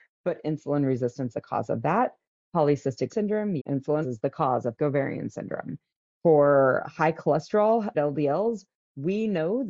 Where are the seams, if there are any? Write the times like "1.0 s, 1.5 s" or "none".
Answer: 1.3 s, 3.1 s, 3.6 s, 4.0 s, 4.8 s, 6.8 s, 7.9 s